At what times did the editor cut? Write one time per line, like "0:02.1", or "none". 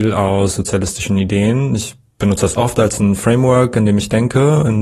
none